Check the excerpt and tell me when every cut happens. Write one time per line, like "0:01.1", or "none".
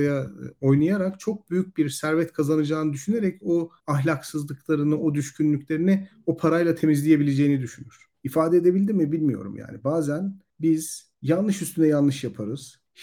0:03.8